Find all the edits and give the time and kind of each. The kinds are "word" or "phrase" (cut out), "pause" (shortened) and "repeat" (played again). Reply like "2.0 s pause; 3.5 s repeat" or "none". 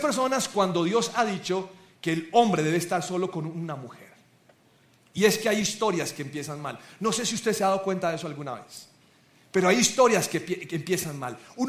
none